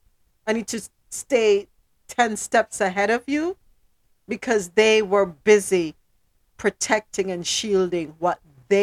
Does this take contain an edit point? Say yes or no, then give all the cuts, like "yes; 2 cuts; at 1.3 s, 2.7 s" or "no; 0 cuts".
no; 0 cuts